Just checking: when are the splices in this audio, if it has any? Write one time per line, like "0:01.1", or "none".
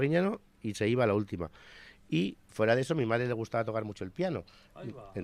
none